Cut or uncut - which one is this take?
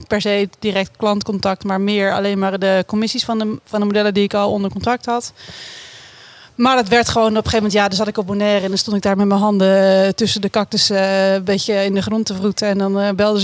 uncut